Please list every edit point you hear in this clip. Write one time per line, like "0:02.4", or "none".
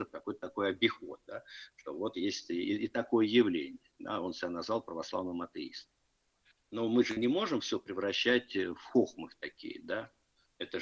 none